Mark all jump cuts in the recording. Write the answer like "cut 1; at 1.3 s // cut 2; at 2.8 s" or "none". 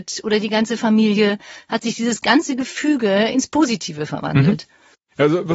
none